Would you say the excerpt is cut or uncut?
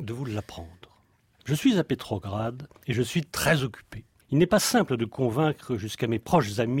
cut